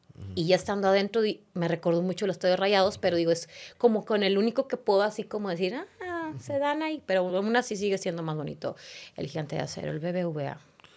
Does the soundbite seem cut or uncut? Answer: uncut